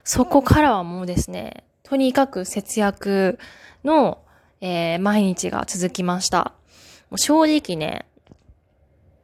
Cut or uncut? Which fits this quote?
uncut